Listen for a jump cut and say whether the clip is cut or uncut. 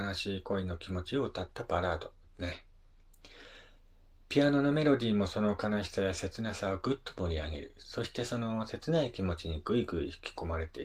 cut